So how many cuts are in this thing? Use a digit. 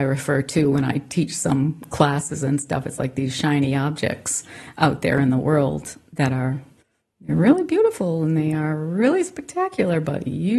0